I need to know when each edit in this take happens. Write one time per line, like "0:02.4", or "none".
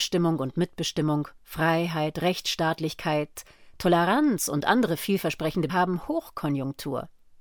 0:05.7